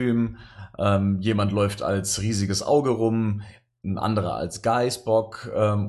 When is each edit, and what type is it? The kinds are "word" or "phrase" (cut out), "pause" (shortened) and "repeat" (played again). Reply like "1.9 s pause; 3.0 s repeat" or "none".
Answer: none

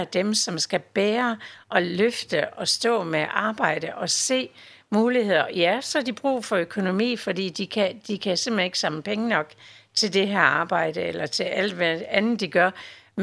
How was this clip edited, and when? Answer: none

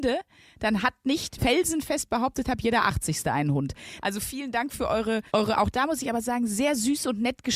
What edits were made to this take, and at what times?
1.4 s phrase; 5.3 s pause

